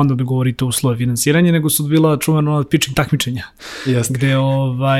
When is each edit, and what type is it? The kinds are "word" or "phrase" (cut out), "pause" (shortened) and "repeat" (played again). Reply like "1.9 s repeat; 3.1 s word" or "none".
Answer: none